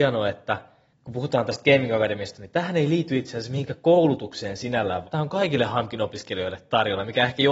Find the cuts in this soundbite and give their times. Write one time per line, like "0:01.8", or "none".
0:00.9
0:05.0